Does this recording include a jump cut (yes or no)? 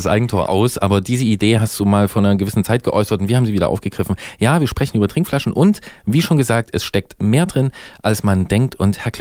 no